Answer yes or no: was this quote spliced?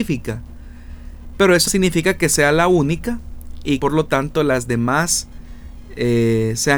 yes